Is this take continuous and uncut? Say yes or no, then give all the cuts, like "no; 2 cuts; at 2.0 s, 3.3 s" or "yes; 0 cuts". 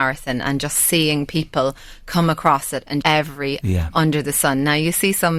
no; 2 cuts; at 3.0 s, 3.6 s